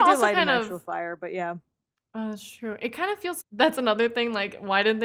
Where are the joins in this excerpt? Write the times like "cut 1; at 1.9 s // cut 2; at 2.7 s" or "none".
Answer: cut 1; at 3.4 s